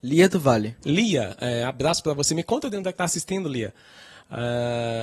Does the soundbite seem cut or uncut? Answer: cut